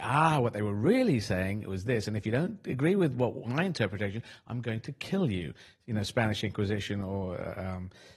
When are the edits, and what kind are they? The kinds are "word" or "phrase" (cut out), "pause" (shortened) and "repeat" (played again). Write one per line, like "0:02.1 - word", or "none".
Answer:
none